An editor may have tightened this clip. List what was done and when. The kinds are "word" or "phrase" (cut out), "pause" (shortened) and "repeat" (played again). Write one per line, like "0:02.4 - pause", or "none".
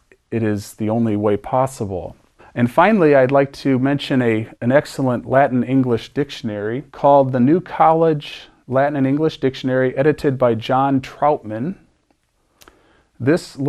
0:02.4 - pause
0:04.5 - pause
0:06.9 - pause

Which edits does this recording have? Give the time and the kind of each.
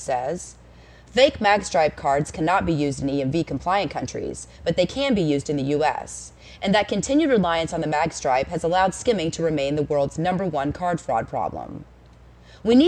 none

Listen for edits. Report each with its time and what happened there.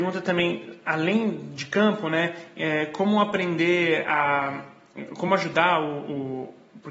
none

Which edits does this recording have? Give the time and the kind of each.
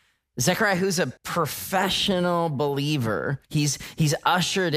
0:01.2 - pause
0:03.4 - pause

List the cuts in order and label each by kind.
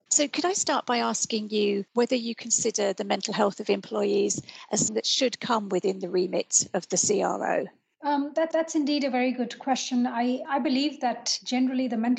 0:01.9 - pause
0:04.9 - word
0:08.5 - repeat
0:10.4 - word

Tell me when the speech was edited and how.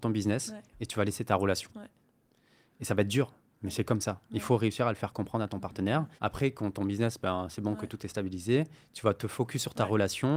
0:06.2 - pause

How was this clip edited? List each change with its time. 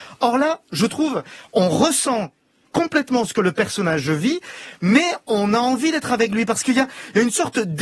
none

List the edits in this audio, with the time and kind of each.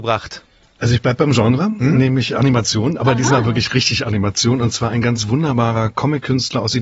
none

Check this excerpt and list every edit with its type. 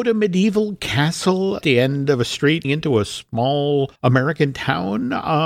0:01.6 - word
0:02.6 - word
0:04.0 - pause

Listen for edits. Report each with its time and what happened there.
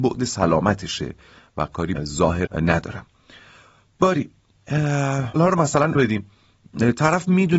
0:02.0 - word
0:02.5 - word
0:05.4 - word
0:06.0 - word

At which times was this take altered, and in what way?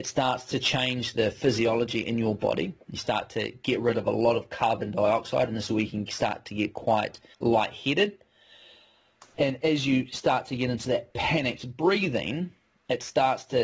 0:07.3 - word

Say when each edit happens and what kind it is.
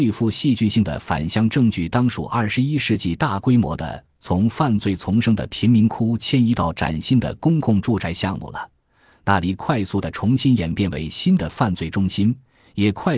none

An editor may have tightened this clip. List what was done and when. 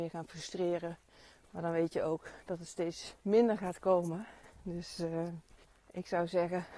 0:03.2 - pause

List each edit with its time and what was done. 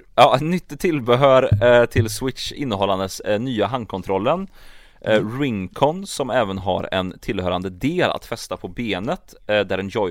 none

